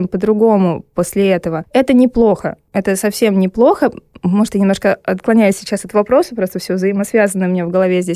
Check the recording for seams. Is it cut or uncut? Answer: uncut